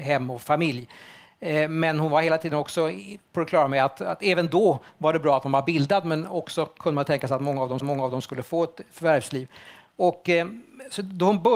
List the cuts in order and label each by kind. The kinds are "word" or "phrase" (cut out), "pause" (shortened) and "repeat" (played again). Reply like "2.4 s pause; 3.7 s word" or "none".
7.8 s repeat

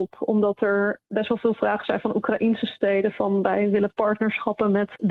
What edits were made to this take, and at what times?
none

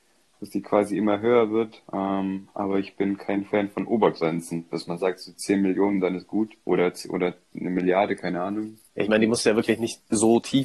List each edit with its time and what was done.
1.8 s pause; 6.6 s pause; 8.8 s pause

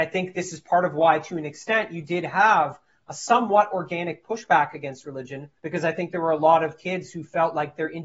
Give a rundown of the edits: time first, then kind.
5.6 s pause

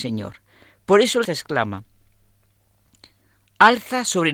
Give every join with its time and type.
1.2 s word

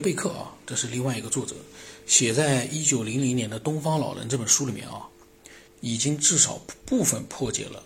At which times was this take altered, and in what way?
5.7 s pause

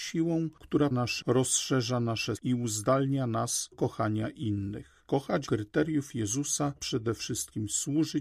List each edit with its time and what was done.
0.9 s word; 1.2 s word; 2.4 s word; 3.7 s word; 5.5 s word; 6.8 s word

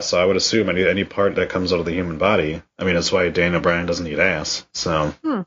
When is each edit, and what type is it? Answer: 2.7 s pause

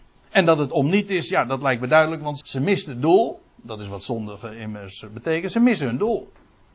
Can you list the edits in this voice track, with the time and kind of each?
2.4 s word

